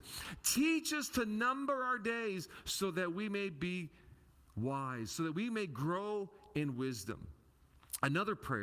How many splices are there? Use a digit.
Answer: 0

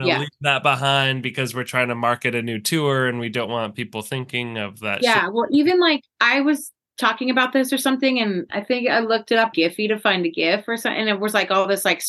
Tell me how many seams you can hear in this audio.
1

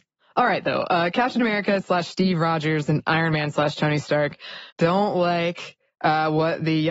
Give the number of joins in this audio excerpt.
1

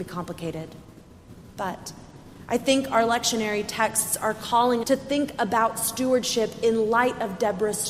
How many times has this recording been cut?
1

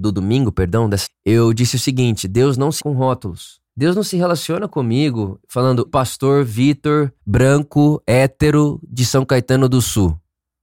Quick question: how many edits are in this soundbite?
5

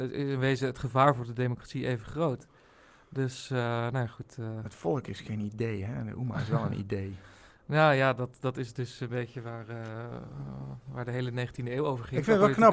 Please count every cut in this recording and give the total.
0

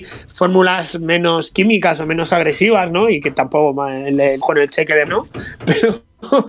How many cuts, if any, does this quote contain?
2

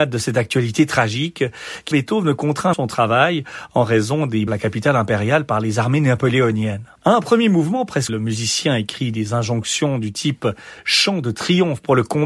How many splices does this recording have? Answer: 5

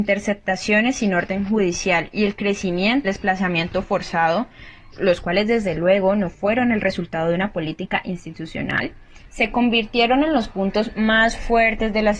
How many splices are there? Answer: 2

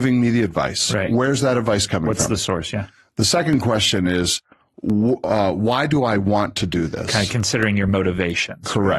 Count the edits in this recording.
0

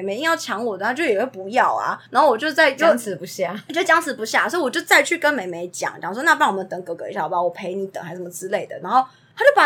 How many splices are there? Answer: 1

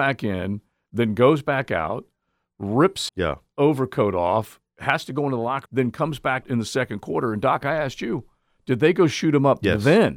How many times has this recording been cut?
3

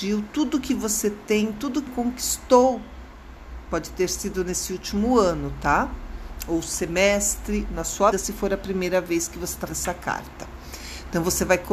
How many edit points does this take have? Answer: 4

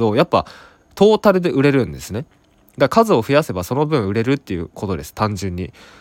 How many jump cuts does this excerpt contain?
0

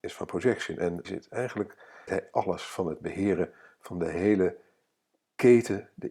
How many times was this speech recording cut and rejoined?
2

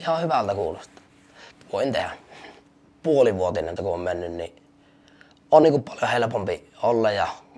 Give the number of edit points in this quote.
2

